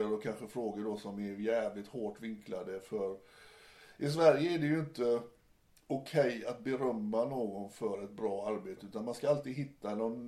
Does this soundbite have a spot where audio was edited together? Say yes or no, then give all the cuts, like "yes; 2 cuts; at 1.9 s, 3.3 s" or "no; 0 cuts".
no; 0 cuts